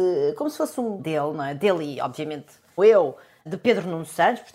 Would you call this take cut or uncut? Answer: cut